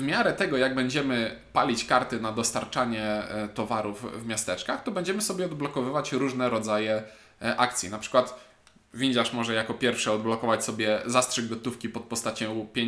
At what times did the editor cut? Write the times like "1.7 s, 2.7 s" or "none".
none